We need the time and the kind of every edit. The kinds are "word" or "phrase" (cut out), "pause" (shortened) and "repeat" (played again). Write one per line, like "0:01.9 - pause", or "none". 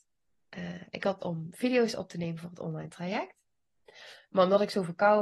0:01.2 - word